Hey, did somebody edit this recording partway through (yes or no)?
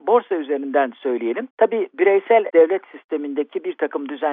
yes